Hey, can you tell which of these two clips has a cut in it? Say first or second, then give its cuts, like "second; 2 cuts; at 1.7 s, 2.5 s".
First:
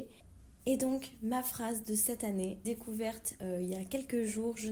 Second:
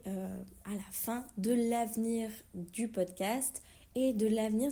first; 1 cut; at 2.6 s